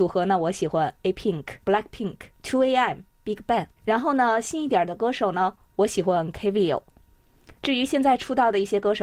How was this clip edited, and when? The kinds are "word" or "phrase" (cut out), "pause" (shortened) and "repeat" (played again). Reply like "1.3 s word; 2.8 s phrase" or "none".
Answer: 1.6 s pause; 2.3 s pause; 3.8 s pause; 7.6 s pause